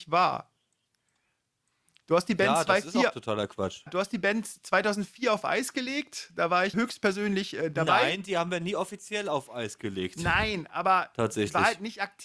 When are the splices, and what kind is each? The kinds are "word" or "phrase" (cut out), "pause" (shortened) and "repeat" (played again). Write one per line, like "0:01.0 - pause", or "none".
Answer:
0:03.9 - word
0:06.7 - word